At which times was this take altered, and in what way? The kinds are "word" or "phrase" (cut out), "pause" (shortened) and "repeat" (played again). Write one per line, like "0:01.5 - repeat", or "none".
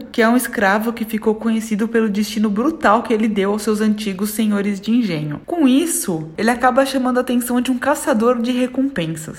none